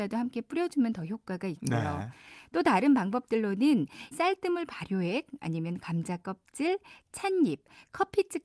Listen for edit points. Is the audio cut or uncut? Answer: cut